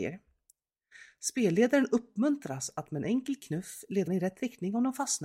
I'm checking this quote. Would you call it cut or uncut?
cut